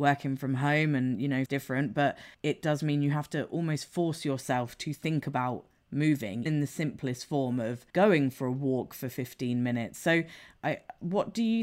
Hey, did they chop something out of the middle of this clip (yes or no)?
yes